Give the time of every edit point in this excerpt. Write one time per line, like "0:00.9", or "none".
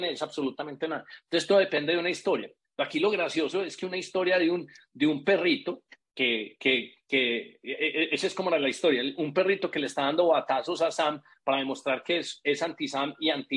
none